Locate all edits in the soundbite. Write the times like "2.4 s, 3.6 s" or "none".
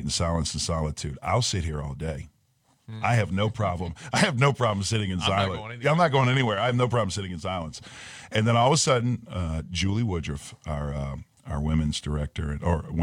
none